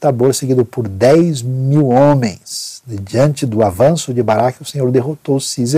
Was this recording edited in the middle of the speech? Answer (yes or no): no